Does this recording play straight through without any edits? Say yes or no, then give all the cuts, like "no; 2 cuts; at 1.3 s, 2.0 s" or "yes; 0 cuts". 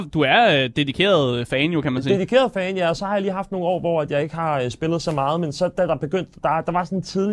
yes; 0 cuts